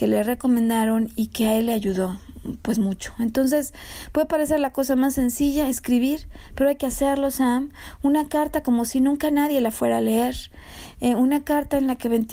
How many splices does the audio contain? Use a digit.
0